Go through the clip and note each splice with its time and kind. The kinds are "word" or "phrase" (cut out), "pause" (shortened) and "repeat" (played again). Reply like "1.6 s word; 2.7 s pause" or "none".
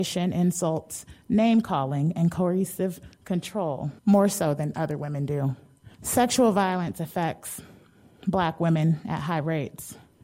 4.0 s pause; 5.9 s pause